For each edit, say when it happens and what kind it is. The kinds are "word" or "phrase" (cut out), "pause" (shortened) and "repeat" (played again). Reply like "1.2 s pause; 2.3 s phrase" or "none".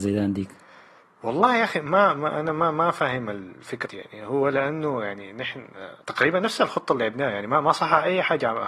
3.9 s phrase; 6.0 s pause